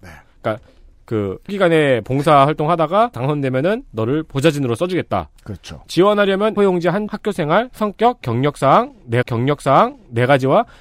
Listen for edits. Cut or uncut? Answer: cut